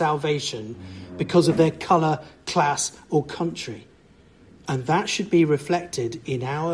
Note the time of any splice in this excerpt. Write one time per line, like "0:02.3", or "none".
none